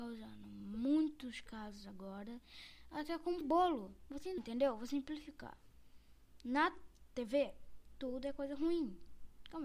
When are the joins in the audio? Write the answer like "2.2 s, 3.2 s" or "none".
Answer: 3.4 s, 4.4 s